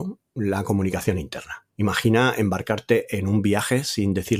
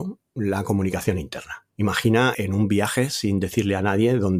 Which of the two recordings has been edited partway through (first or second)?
second